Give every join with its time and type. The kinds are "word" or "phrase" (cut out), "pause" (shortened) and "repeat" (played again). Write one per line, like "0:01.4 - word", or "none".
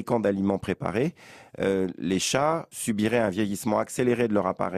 0:02.7 - word